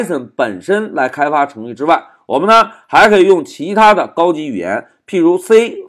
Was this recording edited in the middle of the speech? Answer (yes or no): no